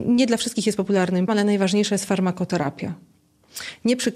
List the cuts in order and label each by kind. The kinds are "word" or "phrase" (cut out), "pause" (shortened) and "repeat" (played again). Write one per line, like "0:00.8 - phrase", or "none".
0:01.3 - word